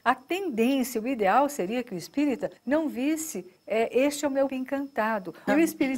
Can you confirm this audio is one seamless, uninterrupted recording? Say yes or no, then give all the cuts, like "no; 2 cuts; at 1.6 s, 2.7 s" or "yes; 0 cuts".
no; 3 cuts; at 2.6 s, 3.6 s, 4.5 s